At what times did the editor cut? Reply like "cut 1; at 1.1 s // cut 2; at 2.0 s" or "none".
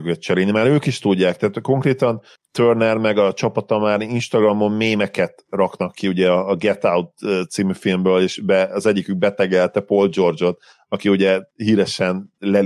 none